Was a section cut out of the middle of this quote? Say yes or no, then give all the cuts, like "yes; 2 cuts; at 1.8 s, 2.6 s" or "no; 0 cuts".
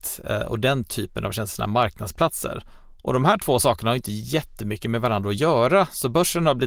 no; 0 cuts